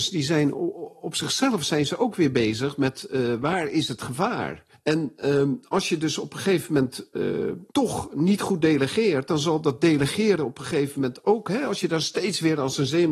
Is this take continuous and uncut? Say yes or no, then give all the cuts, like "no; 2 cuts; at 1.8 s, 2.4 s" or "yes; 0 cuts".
no; 2 cuts; at 4.7 s, 7.7 s